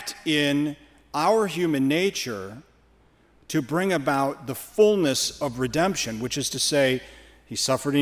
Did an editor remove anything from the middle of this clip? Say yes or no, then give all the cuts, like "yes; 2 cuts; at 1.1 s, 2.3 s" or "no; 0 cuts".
no; 0 cuts